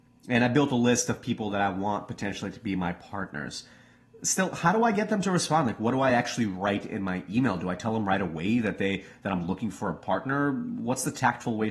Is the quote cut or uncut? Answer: uncut